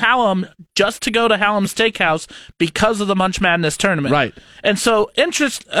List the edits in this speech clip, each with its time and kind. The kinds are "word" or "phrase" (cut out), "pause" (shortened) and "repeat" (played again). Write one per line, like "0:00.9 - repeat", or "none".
none